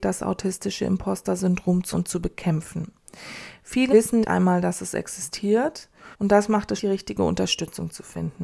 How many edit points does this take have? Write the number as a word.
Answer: five